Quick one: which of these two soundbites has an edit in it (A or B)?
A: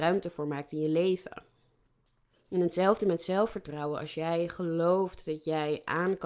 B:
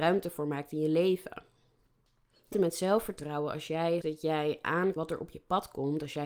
B